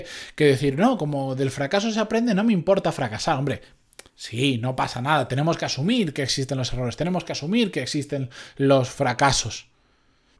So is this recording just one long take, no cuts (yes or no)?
no